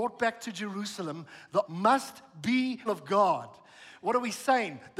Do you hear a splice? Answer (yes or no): yes